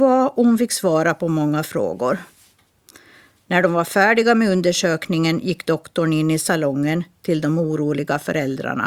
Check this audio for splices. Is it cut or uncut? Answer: uncut